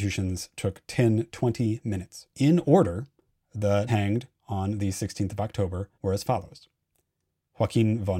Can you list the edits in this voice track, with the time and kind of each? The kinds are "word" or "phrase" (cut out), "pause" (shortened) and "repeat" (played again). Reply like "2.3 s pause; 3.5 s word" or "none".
1.3 s word; 2.3 s pause; 3.9 s word; 5.9 s pause